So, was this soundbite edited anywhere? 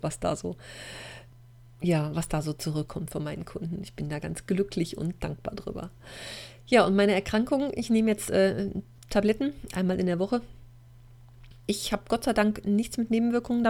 no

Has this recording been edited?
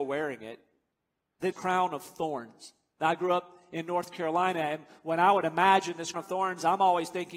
yes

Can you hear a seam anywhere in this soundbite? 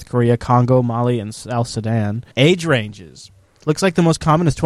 yes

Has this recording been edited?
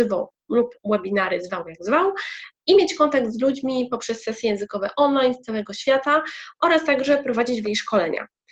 yes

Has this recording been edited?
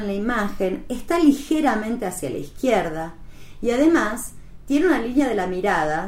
no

